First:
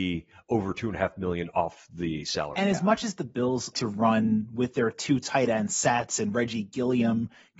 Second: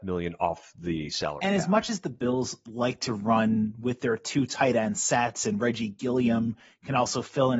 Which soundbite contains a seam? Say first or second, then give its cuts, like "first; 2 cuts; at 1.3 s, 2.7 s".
first; 1 cut; at 3.7 s